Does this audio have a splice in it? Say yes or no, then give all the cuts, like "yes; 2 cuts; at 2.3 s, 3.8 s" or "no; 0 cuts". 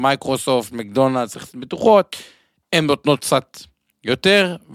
yes; 1 cut; at 1.3 s